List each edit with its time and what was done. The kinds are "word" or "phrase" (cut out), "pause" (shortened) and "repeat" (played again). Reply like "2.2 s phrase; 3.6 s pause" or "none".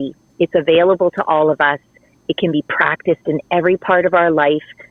none